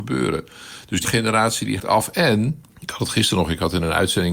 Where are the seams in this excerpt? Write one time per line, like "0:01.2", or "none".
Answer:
0:01.0
0:01.8
0:02.7